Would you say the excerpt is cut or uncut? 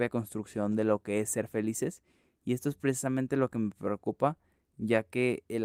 uncut